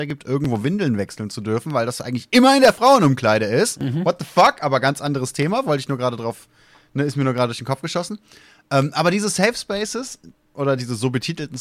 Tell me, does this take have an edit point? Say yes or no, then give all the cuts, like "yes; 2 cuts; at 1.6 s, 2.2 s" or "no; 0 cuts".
no; 0 cuts